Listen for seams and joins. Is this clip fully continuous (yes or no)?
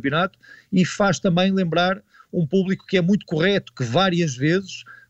yes